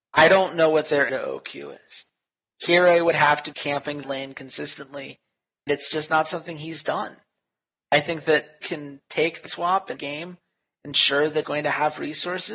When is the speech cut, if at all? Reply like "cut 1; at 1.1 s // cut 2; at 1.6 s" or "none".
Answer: cut 1; at 1.1 s // cut 2; at 3.5 s // cut 3; at 4.0 s // cut 4; at 5.7 s // cut 5; at 8.6 s // cut 6; at 9.5 s // cut 7; at 10.0 s // cut 8; at 11.4 s